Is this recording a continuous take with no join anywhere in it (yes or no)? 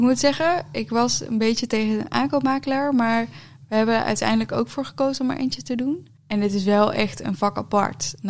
no